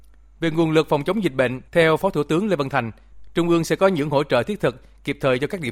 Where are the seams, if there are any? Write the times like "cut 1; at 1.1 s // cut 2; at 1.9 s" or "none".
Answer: cut 1; at 1.7 s